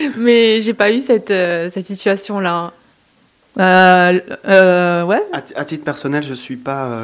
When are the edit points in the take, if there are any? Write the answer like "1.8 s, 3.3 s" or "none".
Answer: none